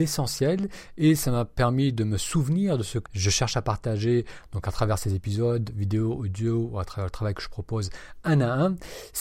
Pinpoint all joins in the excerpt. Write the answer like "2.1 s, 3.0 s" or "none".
3.1 s